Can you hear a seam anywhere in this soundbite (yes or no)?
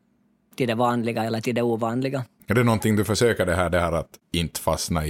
no